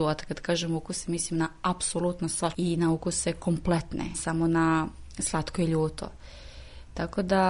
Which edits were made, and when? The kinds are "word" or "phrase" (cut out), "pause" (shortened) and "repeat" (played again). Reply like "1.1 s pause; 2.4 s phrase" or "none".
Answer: 2.5 s word; 4.1 s word